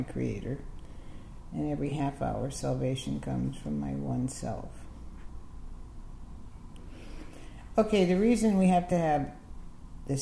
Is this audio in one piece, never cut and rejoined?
yes; 0 cuts

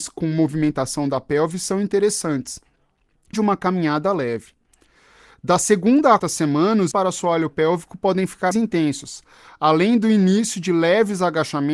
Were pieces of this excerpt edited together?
yes; 4 cuts; at 3.3 s, 6.2 s, 6.9 s, 8.5 s

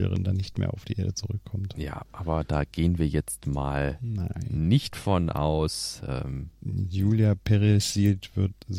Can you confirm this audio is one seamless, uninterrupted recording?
yes; 0 cuts

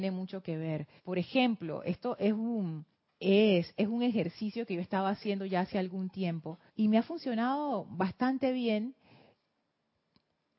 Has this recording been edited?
yes; 3 cuts; at 1.0 s, 2.9 s, 6.7 s

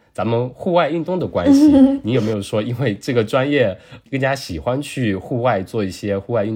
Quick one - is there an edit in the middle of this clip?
no; 0 cuts

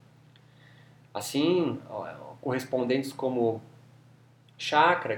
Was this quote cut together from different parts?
no; 0 cuts

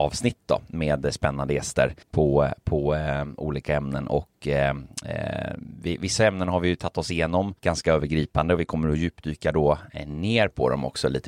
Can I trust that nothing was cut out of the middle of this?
no; 2 cuts; at 2.0 s, 7.6 s

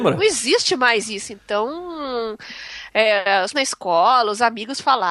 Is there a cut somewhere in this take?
yes; 1 cut; at 3.5 s

